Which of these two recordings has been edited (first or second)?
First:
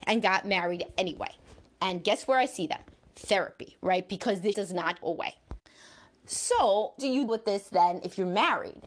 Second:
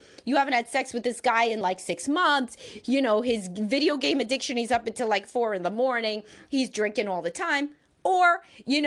first